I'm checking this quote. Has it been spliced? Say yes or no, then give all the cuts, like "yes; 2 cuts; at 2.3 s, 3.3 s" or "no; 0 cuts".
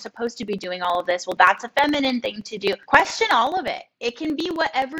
yes; 2 cuts; at 2.8 s, 3.9 s